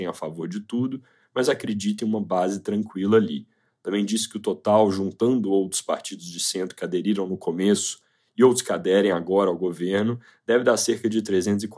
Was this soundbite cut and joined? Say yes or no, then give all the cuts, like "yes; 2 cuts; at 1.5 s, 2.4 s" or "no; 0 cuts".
no; 0 cuts